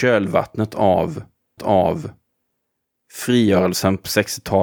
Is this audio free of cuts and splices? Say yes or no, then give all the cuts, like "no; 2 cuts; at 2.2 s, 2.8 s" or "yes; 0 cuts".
no; 1 cut; at 1.6 s